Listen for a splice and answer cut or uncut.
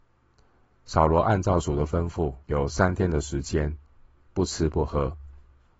cut